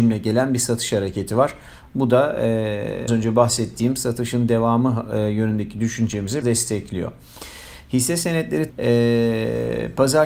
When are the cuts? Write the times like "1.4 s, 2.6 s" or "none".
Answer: 3.1 s, 6.4 s, 8.7 s